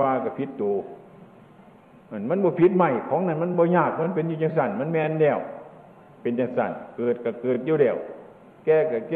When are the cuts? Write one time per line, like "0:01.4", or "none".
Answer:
none